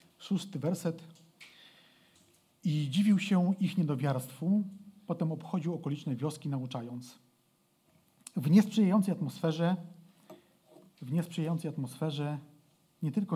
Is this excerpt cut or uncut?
uncut